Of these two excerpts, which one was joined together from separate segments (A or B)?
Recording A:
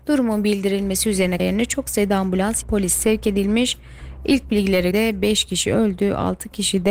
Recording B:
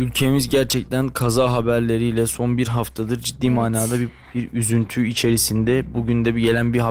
A